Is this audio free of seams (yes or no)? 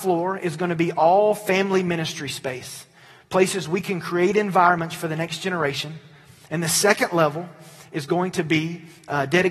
yes